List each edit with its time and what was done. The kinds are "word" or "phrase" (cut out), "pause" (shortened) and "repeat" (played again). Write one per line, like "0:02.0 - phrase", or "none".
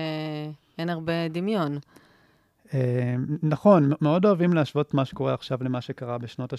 none